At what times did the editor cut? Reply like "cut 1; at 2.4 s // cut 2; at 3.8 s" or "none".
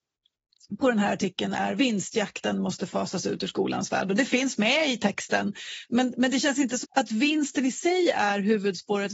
cut 1; at 6.8 s